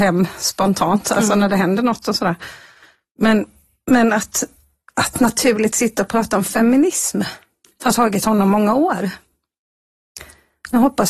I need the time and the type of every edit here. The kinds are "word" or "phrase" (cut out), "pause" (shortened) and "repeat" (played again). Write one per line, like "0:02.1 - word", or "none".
none